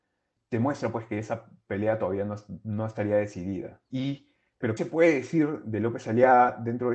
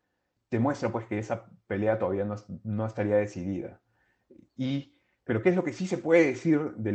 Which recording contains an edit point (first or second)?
first